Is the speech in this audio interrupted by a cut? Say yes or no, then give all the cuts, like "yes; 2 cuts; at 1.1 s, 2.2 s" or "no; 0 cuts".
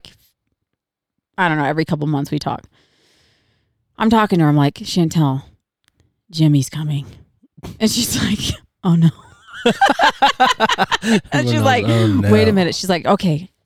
no; 0 cuts